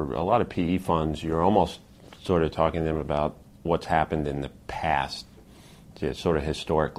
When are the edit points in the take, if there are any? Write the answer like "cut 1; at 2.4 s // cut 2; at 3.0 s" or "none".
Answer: none